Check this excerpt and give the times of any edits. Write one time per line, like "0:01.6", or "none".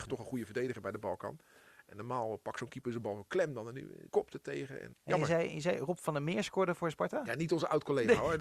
0:04.1
0:04.9

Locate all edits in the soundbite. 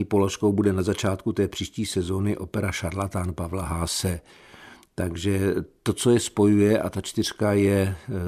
none

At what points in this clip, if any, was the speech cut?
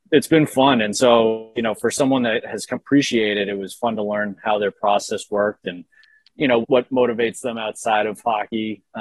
0:02.7
0:06.3
0:06.6

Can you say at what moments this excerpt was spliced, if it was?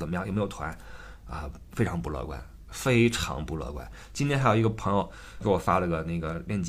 0:05.4

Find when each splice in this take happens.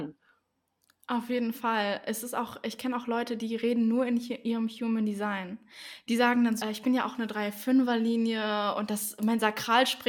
0:06.6

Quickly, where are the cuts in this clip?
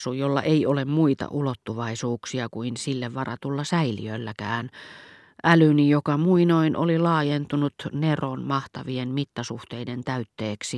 none

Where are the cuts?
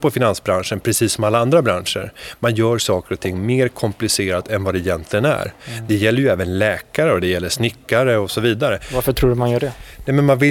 none

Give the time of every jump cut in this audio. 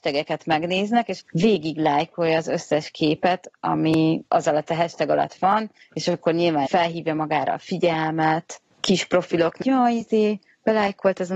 0:01.2
0:04.3
0:06.7
0:08.7
0:09.6

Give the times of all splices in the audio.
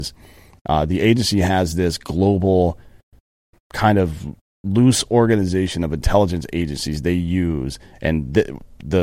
none

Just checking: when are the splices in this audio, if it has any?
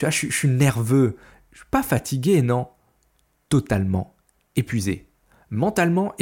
none

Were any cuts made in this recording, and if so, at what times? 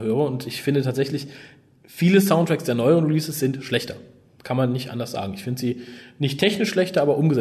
none

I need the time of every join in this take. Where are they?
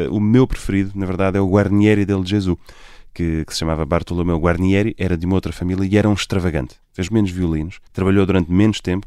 0:07.1
0:07.9

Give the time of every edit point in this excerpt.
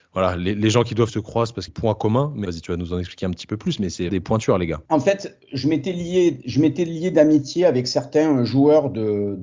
0:01.1
0:01.7
0:02.4
0:04.1
0:04.9

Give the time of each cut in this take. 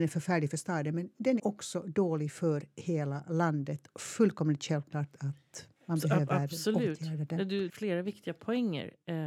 0:01.4
0:03.9
0:05.8
0:07.7

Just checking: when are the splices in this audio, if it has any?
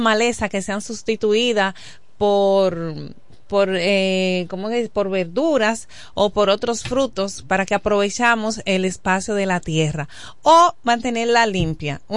none

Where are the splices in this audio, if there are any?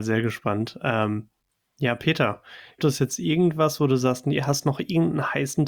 0:02.8

